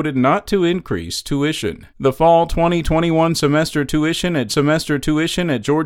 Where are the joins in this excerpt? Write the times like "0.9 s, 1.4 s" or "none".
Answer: 1.9 s, 4.5 s